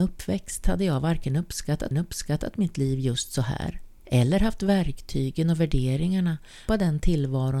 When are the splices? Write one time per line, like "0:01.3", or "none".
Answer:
0:01.9
0:04.0
0:06.7